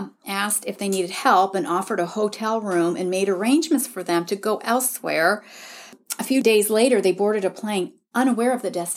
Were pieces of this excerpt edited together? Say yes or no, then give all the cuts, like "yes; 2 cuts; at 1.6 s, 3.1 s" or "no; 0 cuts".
no; 0 cuts